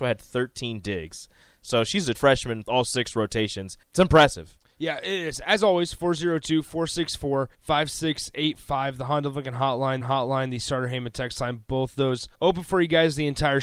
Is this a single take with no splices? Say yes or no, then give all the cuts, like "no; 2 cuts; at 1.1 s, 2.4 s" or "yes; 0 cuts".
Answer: no; 6 cuts; at 2.1 s, 2.6 s, 3.8 s, 7.5 s, 10.0 s, 12.3 s